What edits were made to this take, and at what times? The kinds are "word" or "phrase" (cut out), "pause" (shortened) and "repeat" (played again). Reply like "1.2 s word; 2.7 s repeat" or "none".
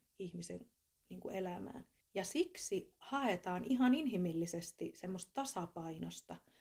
2.0 s pause